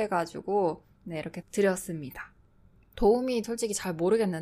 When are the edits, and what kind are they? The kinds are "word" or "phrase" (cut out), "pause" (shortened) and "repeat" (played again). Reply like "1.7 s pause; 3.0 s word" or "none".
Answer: 1.4 s word; 3.4 s word